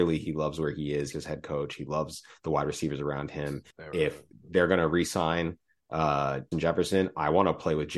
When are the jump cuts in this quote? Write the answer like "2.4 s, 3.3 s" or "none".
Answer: 1.1 s, 3.7 s, 6.5 s